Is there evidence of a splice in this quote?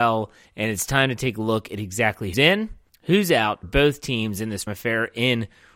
yes; 4 cuts; at 2.3 s, 2.9 s, 3.6 s, 4.7 s

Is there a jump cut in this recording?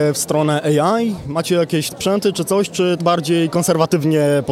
yes; 2 cuts; at 1.9 s, 3.0 s

